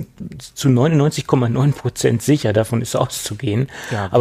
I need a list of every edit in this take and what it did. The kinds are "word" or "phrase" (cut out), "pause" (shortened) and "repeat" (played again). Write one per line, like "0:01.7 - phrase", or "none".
none